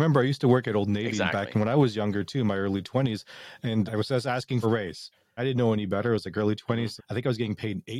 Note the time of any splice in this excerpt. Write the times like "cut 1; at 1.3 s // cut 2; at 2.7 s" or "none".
cut 1; at 3.9 s // cut 2; at 4.6 s // cut 3; at 5.4 s // cut 4; at 7.0 s